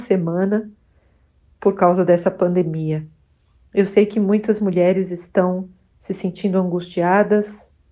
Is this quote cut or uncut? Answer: uncut